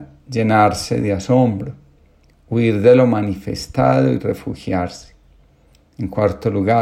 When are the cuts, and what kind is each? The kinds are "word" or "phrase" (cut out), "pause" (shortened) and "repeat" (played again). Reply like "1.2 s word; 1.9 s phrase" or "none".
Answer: none